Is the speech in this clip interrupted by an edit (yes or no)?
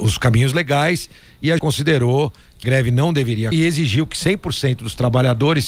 yes